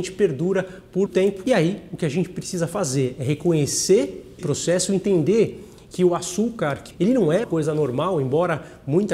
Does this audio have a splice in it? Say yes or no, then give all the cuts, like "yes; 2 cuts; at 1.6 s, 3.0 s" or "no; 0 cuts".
yes; 4 cuts; at 1.1 s, 4.4 s, 6.9 s, 7.4 s